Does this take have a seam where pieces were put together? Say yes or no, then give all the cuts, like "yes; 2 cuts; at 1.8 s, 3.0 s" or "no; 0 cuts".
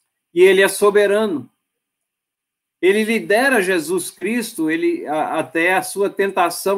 no; 0 cuts